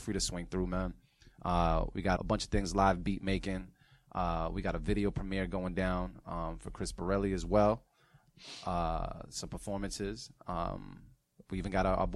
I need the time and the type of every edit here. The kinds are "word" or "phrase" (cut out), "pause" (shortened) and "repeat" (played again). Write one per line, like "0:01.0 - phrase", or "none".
0:02.2 - word